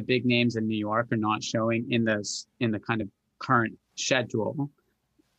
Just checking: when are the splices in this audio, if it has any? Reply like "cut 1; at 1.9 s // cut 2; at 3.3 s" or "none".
none